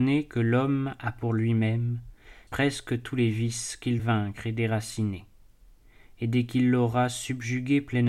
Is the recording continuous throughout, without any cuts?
no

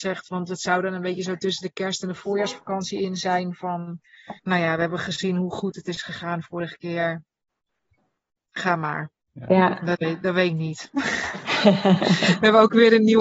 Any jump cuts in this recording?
yes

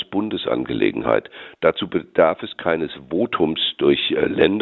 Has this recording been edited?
no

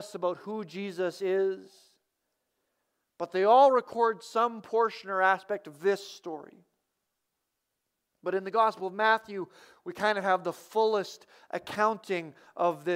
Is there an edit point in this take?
no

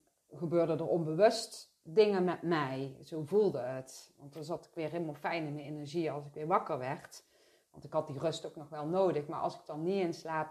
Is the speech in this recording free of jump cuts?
yes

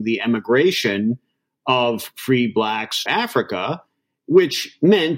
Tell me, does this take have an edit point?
yes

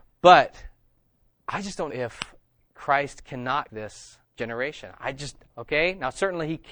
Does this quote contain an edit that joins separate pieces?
yes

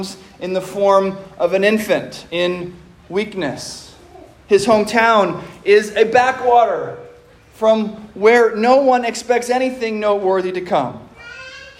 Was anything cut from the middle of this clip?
no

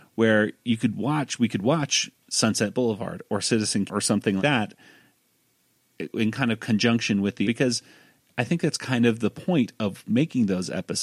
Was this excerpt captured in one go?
no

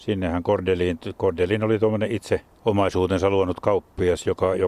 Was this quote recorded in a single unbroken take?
yes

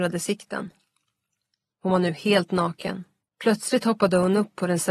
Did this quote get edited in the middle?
yes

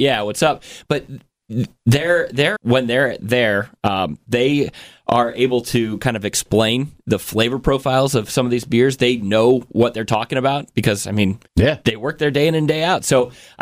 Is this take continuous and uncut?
no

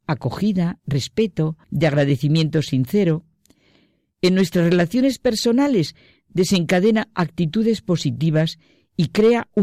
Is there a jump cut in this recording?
yes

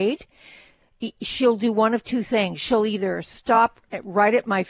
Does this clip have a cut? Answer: no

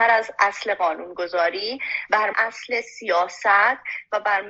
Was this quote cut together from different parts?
yes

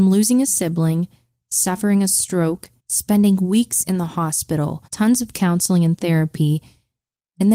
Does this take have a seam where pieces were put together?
yes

